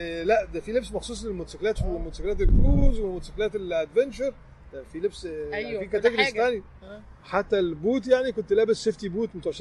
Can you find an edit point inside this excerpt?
yes; 2 cuts; at 1.8 s, 7.2 s

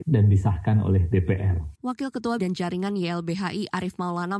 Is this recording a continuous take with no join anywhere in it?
no; 2 cuts; at 1.8 s, 2.4 s

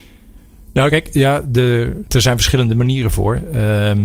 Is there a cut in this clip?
no; 0 cuts

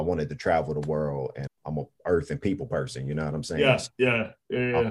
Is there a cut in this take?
yes; 1 cut; at 1.5 s

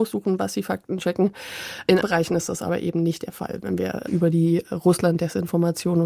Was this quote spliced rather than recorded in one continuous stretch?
yes; 2 cuts; at 2.0 s, 4.1 s

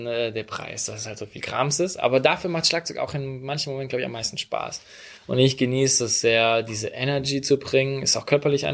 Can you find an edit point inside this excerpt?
no; 0 cuts

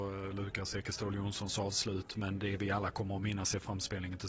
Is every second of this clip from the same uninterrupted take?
yes; 0 cuts

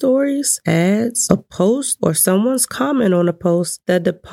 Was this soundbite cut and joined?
no; 0 cuts

